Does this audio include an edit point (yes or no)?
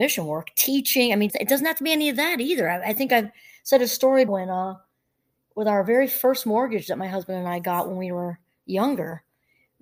yes